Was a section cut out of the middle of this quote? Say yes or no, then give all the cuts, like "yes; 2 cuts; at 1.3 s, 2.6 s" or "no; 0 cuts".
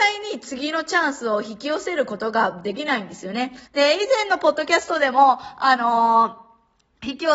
yes; 1 cut; at 3.7 s